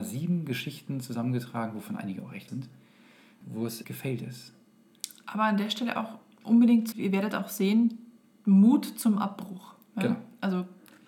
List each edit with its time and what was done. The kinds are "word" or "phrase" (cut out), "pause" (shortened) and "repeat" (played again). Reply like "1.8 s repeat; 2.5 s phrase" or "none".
2.5 s word; 3.4 s word; 3.8 s word; 6.9 s word